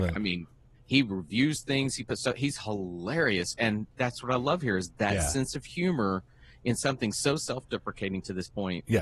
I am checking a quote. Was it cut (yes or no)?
no